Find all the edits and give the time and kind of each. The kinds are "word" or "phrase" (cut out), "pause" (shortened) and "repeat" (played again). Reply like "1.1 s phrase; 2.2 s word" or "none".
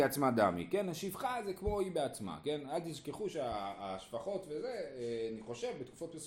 none